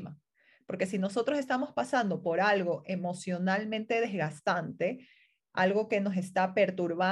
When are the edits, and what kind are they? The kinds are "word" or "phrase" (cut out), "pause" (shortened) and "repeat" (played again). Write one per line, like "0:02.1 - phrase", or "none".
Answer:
none